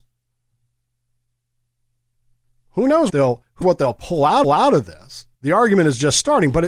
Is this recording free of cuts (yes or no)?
no